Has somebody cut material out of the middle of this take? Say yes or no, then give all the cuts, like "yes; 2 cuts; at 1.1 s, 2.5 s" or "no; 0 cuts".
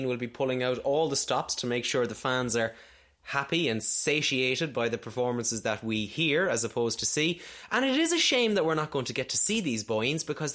no; 0 cuts